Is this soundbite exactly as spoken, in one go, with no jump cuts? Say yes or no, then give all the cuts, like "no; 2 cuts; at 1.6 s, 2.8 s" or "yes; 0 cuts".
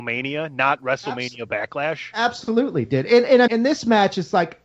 no; 2 cuts; at 2.8 s, 3.5 s